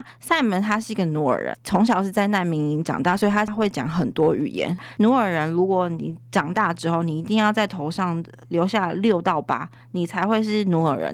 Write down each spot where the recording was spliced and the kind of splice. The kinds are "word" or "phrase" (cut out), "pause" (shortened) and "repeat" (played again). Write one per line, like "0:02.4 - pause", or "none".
none